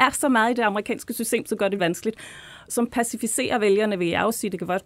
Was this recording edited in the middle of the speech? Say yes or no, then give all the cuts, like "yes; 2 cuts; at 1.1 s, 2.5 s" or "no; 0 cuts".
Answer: yes; 1 cut; at 1.8 s